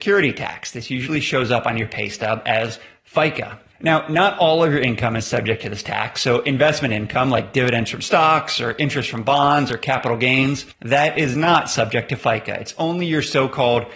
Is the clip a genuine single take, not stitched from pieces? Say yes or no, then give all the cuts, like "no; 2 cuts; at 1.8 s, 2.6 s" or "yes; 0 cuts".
yes; 0 cuts